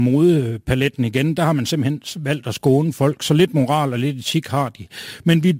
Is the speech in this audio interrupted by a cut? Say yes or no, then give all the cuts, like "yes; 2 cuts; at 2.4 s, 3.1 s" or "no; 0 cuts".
no; 0 cuts